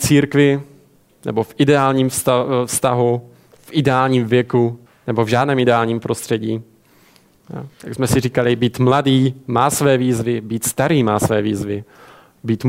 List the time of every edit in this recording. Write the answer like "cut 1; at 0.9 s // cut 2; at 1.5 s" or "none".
cut 1; at 4.9 s